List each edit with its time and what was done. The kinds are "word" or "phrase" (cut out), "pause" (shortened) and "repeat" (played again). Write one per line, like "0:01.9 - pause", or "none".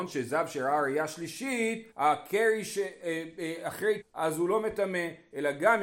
0:01.9 - pause
0:04.0 - word